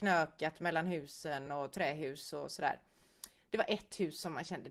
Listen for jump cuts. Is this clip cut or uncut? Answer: uncut